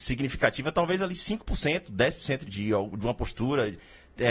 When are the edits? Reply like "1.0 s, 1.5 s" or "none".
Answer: 2.4 s